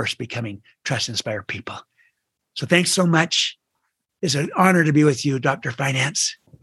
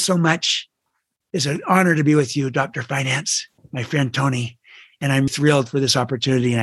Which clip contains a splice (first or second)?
second